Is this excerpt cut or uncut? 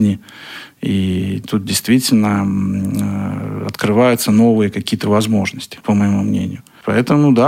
cut